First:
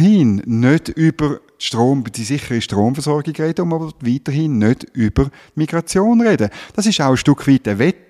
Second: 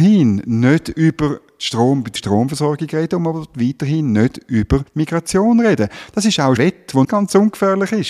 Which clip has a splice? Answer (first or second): second